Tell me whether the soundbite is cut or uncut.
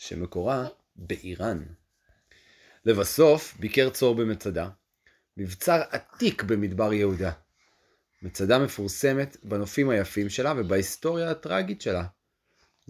uncut